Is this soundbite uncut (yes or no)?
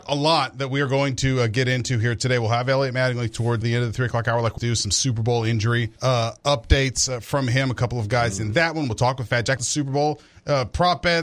no